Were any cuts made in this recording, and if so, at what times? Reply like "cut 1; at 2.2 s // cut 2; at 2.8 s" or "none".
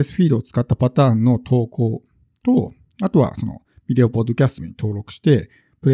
cut 1; at 4.6 s